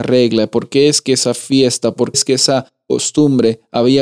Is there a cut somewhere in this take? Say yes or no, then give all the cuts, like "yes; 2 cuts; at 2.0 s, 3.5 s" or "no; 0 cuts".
yes; 1 cut; at 2.1 s